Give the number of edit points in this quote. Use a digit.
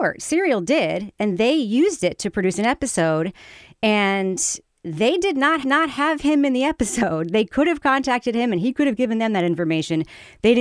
1